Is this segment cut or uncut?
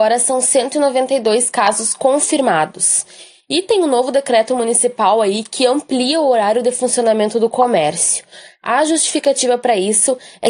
uncut